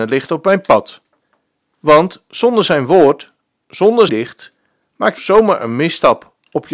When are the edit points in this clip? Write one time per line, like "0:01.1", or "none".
0:01.2
0:04.1
0:05.2